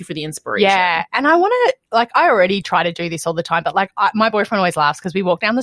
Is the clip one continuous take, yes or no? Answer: yes